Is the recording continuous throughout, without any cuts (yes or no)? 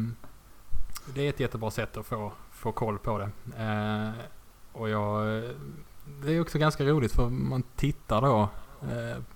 yes